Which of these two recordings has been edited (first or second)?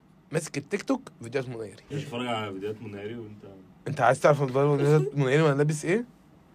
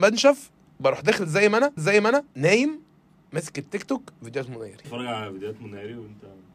second